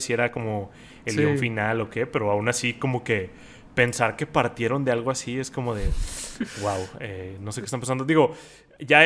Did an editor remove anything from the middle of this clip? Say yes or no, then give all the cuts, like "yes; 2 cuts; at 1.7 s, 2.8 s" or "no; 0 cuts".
no; 0 cuts